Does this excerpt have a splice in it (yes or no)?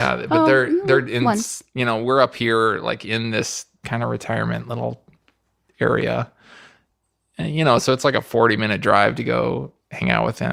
no